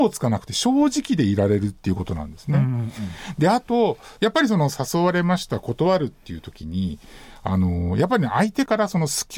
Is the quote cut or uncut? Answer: uncut